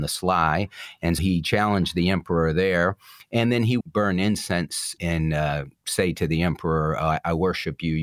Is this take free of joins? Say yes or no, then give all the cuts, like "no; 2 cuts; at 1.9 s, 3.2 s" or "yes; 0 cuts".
no; 3 cuts; at 1.2 s, 3.8 s, 5.0 s